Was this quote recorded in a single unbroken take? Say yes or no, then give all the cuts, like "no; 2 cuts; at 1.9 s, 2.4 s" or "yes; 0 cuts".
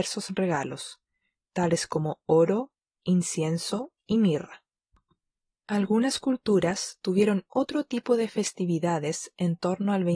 yes; 0 cuts